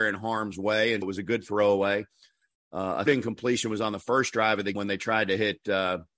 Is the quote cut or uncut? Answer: cut